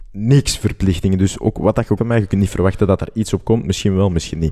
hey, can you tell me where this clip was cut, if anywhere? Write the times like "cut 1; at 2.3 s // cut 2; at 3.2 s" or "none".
cut 1; at 2.0 s